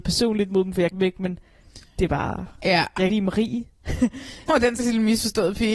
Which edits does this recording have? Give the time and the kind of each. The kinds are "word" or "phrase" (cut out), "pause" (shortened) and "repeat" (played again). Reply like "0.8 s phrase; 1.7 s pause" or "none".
0.9 s word; 2.5 s pause; 3.1 s phrase; 4.5 s word; 4.8 s word